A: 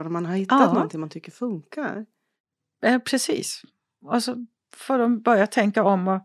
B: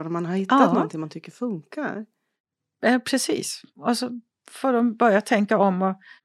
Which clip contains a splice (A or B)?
B